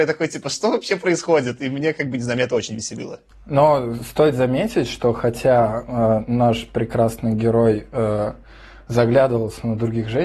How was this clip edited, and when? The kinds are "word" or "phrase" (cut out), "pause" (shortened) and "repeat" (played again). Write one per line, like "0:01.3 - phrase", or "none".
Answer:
none